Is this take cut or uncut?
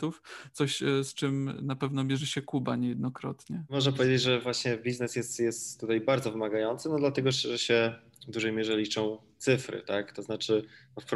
uncut